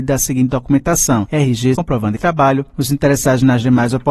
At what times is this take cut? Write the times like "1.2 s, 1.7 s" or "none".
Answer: 1.7 s, 2.2 s